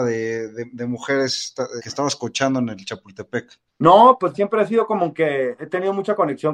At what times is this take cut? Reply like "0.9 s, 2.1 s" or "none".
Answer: 1.8 s, 3.7 s, 4.3 s

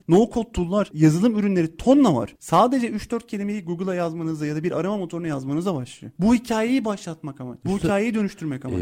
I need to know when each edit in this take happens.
none

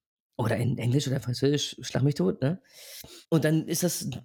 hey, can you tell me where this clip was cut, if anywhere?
3.2 s

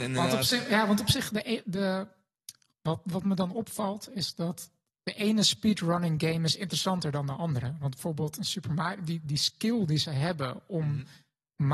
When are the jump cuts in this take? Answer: none

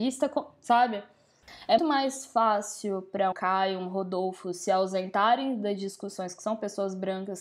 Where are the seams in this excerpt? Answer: 1.8 s, 3.3 s

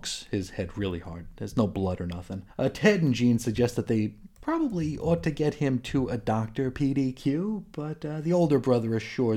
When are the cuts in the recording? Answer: 2.5 s

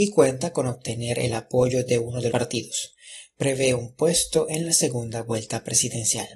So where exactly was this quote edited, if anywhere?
2.3 s

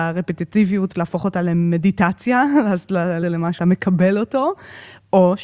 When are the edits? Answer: 0.9 s, 3.2 s, 3.6 s

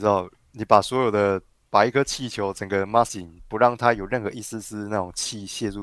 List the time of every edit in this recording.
3.1 s

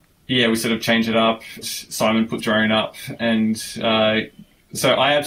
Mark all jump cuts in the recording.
1.6 s, 2.4 s

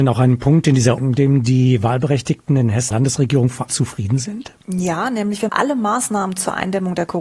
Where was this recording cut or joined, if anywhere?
1.0 s, 2.9 s, 3.7 s, 4.6 s, 5.5 s

